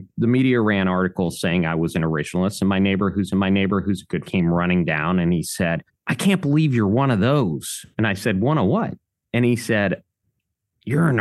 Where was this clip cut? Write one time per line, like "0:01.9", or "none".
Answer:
0:03.3
0:04.2
0:05.9